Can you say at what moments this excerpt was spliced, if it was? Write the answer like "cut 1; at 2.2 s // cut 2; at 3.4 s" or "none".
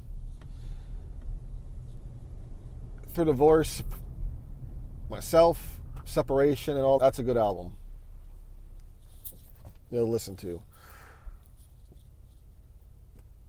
cut 1; at 3.1 s // cut 2; at 5.1 s // cut 3; at 7.0 s